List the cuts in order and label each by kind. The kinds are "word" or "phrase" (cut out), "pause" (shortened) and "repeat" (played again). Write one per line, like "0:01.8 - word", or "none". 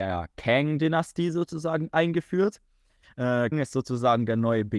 0:03.5 - word